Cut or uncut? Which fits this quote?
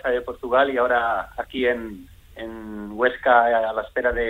uncut